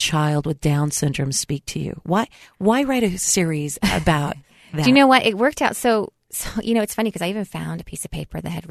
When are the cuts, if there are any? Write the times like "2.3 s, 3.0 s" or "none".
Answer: none